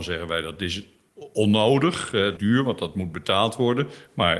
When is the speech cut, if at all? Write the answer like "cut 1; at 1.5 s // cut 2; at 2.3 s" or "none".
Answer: cut 1; at 2.4 s